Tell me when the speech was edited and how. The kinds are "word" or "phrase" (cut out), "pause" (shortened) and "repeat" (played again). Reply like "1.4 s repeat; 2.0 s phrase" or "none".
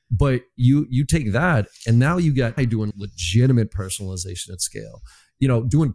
2.6 s word; 2.9 s word